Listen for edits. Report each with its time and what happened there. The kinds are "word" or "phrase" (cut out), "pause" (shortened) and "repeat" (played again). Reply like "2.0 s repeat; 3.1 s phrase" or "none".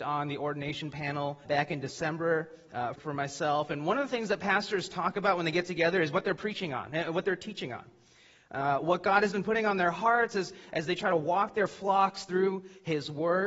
1.5 s word; 3.0 s word